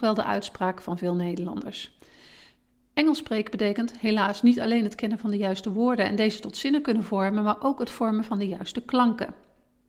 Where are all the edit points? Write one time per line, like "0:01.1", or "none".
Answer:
none